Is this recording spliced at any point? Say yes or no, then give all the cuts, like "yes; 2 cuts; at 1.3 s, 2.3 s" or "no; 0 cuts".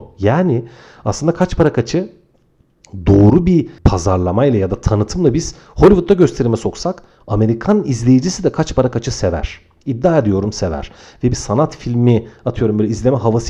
no; 0 cuts